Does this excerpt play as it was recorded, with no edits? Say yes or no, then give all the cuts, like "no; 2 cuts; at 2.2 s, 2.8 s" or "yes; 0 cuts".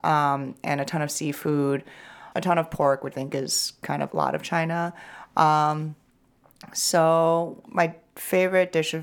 no; 4 cuts; at 2.3 s, 3.1 s, 4.1 s, 7.7 s